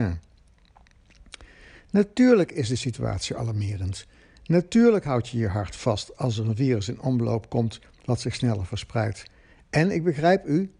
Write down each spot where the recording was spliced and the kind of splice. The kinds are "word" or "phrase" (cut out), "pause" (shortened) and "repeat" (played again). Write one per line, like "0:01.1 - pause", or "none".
none